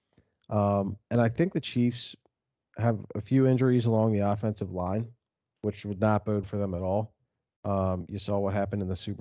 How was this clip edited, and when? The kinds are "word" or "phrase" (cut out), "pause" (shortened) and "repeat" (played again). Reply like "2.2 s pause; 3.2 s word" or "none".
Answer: 6.4 s word